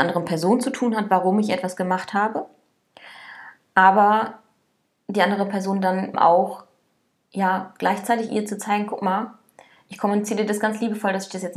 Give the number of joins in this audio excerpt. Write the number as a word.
one